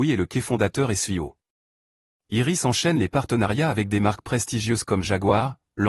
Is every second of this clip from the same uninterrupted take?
yes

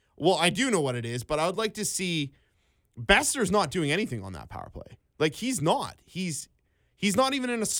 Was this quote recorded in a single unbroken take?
yes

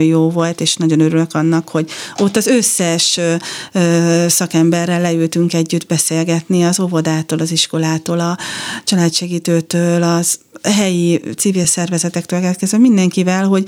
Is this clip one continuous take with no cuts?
yes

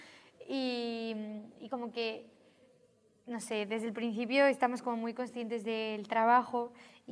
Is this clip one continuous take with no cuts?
yes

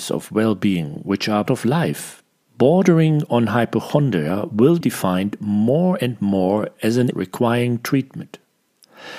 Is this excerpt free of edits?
no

